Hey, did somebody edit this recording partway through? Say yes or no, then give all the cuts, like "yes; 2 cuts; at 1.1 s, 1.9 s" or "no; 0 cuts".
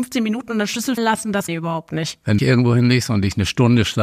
yes; 3 cuts; at 1.0 s, 1.5 s, 2.4 s